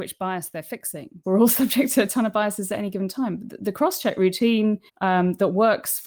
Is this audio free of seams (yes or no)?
no